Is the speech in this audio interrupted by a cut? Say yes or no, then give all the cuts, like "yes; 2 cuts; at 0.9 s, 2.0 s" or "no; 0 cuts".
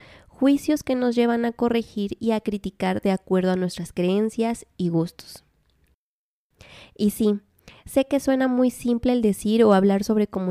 no; 0 cuts